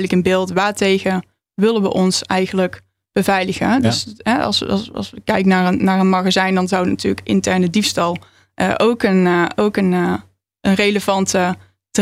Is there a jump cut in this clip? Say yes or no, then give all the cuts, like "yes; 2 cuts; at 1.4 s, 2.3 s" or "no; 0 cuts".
no; 0 cuts